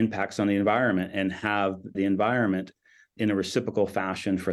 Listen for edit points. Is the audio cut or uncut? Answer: cut